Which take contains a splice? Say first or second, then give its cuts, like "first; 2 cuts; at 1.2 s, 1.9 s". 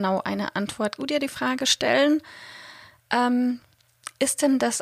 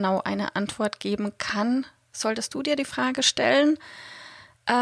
first; 1 cut; at 1.0 s